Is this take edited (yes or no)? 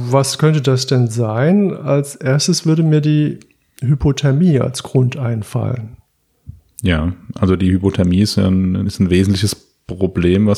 no